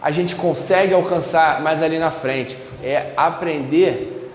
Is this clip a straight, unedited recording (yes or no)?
no